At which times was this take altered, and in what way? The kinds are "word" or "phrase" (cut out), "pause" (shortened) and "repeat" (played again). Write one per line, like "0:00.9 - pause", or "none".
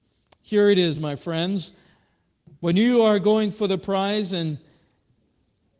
none